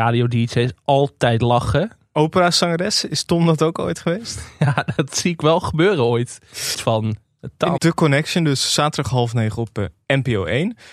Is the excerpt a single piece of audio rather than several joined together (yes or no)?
no